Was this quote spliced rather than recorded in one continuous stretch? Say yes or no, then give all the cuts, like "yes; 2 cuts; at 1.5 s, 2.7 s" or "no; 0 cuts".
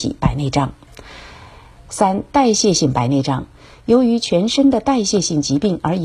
no; 0 cuts